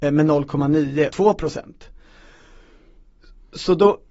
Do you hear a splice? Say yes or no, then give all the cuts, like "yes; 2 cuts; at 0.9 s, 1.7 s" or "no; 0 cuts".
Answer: yes; 1 cut; at 1.1 s